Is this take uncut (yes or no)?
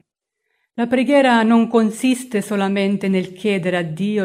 yes